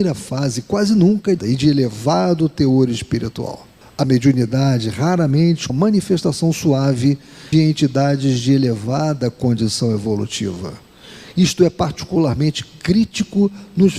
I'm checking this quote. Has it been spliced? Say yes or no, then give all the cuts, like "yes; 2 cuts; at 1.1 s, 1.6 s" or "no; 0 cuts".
yes; 4 cuts; at 1.4 s, 3.8 s, 5.7 s, 7.5 s